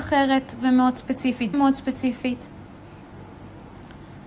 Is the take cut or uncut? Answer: cut